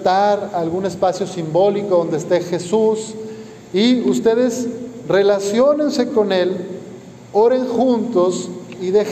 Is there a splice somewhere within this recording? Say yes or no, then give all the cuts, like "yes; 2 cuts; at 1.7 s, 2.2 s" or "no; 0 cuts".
no; 0 cuts